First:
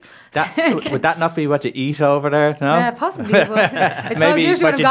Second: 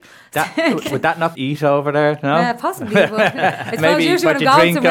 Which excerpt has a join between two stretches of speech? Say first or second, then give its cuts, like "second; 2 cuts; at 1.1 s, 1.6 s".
second; 1 cut; at 1.3 s